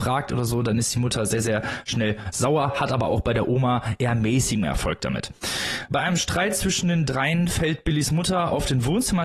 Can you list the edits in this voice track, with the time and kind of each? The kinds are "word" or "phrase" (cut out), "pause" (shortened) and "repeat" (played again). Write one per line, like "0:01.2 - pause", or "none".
none